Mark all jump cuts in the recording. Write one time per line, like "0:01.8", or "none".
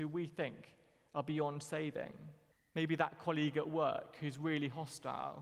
0:02.5